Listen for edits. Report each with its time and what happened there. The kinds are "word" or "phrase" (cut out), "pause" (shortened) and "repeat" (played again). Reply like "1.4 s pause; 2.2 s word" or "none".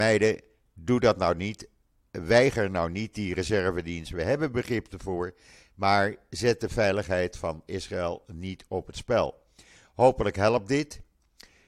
none